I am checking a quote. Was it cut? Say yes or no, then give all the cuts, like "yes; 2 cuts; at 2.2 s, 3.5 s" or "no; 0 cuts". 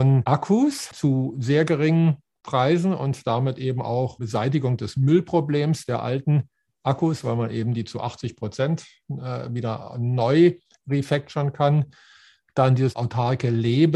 no; 0 cuts